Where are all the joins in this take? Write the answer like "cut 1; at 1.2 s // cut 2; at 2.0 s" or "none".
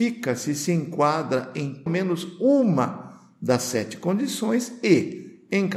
cut 1; at 1.9 s